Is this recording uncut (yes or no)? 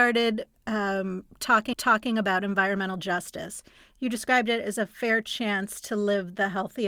no